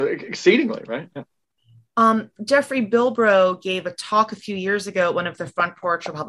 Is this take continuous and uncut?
yes; 0 cuts

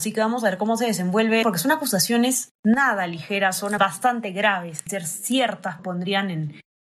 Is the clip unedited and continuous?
no; 5 cuts; at 1.4 s, 2.5 s, 3.8 s, 4.9 s, 5.8 s

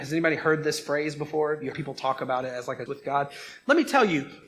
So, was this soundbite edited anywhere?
yes; 2 cuts; at 1.7 s, 2.9 s

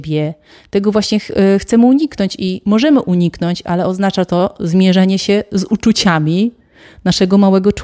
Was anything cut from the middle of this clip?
no; 0 cuts

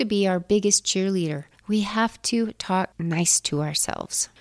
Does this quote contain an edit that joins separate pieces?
no; 0 cuts

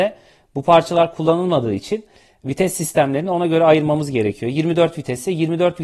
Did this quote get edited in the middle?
no; 0 cuts

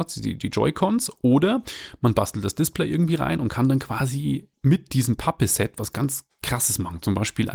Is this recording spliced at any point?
yes; 1 cut; at 4.5 s

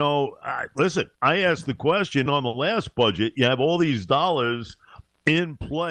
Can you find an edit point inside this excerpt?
yes; 2 cuts; at 1.1 s, 2.3 s

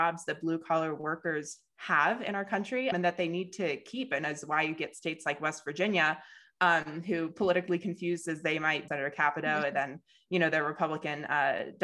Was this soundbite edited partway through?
yes; 2 cuts; at 2.9 s, 8.9 s

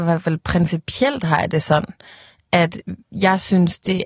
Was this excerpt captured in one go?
no; 1 cut; at 3.0 s

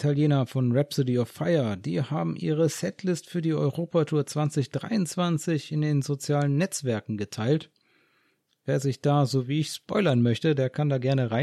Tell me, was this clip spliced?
no; 0 cuts

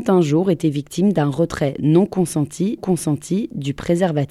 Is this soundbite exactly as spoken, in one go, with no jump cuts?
no; 1 cut; at 2.8 s

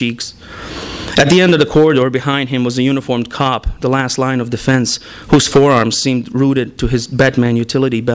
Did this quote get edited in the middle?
no; 0 cuts

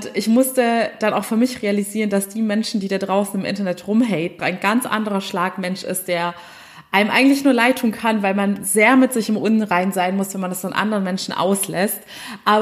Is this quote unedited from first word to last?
no; 1 cut; at 4.4 s

